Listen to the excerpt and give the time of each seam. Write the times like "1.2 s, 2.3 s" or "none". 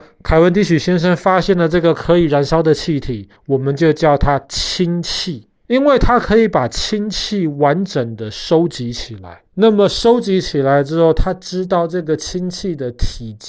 3.4 s, 5.6 s, 9.5 s